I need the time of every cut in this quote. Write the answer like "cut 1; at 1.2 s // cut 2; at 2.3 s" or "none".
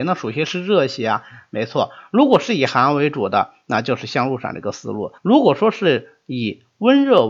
cut 1; at 5.2 s